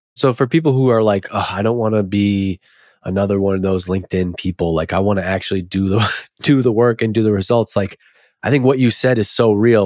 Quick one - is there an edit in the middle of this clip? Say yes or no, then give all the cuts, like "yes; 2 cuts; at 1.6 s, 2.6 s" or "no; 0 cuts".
no; 0 cuts